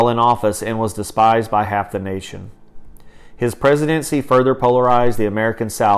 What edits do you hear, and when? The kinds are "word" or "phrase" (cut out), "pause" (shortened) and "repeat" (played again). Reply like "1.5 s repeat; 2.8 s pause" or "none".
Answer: none